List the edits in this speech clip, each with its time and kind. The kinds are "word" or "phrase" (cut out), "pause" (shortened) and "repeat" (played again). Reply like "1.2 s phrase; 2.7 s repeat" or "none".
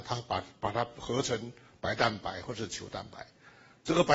none